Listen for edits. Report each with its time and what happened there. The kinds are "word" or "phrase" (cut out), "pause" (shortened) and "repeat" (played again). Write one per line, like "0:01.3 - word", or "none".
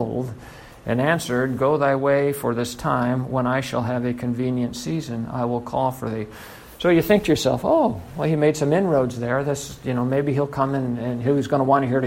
none